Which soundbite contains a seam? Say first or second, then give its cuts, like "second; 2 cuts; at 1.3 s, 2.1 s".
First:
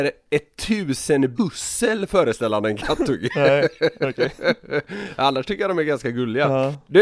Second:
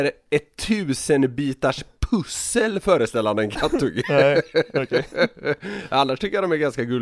first; 1 cut; at 1.4 s